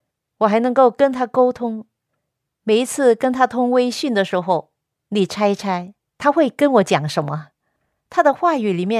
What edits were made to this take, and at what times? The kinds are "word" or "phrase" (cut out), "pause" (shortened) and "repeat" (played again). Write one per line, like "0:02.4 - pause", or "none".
none